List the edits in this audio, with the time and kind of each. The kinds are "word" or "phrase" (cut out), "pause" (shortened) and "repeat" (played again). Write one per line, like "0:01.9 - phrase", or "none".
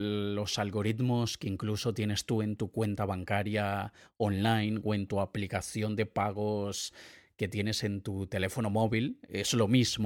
none